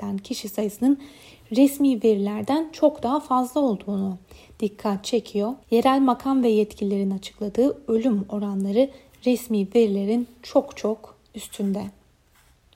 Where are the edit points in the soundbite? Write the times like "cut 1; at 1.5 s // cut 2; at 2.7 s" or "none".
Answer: cut 1; at 5.6 s